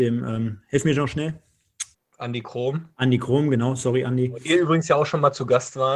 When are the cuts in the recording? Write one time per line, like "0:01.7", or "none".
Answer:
0:01.9